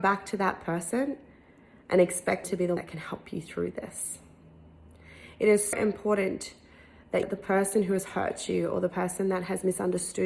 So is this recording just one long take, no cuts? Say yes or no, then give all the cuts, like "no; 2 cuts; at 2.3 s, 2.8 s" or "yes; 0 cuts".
no; 4 cuts; at 2.4 s, 2.8 s, 5.7 s, 7.2 s